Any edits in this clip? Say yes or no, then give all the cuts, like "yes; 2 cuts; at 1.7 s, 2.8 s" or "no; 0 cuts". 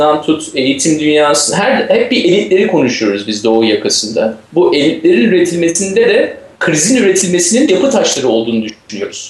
yes; 2 cuts; at 4.4 s, 6.5 s